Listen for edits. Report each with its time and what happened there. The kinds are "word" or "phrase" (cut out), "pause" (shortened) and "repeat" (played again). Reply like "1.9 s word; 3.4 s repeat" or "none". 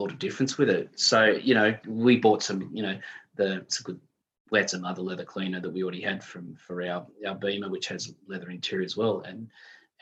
1.8 s word; 3.7 s word